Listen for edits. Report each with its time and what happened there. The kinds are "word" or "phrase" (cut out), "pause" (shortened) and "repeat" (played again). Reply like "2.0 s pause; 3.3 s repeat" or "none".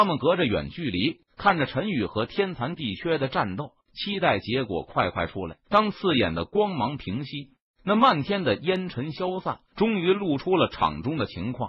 1.3 s pause; 3.8 s pause; 5.6 s pause; 9.7 s pause